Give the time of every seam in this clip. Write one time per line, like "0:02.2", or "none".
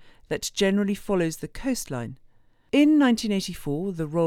none